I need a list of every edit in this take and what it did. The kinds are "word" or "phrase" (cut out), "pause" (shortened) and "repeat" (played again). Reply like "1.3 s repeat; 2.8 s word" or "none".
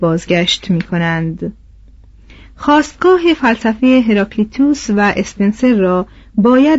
none

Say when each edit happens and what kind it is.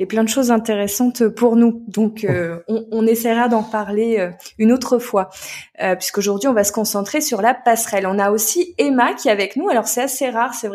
none

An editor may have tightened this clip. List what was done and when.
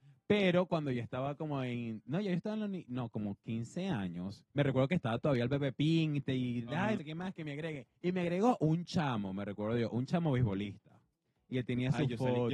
4.5 s pause; 7.0 s phrase; 8.0 s pause

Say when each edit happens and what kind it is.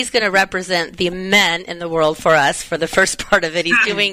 none

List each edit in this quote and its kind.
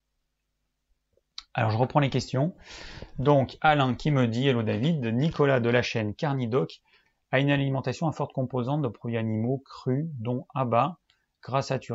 none

